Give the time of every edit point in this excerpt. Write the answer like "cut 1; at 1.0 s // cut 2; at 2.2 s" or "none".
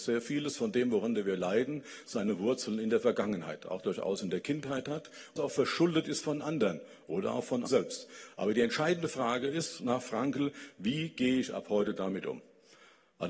cut 1; at 5.4 s // cut 2; at 7.7 s